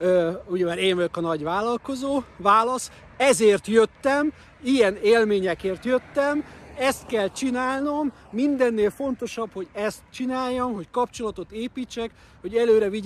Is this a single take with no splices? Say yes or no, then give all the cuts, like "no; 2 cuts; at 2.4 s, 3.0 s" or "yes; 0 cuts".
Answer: yes; 0 cuts